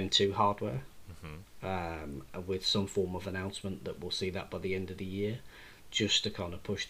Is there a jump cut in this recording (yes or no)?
no